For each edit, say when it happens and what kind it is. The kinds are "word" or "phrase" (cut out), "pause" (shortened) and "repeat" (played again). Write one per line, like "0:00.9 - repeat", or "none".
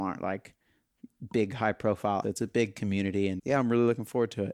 0:02.2 - word
0:03.4 - word